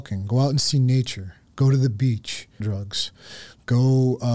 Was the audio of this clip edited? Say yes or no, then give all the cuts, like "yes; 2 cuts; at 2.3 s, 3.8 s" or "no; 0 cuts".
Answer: yes; 1 cut; at 2.6 s